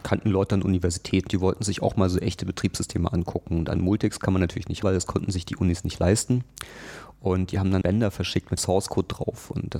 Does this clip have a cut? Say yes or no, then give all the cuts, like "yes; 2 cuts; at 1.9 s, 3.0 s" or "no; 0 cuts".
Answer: yes; 4 cuts; at 1.3 s, 4.8 s, 7.8 s, 8.6 s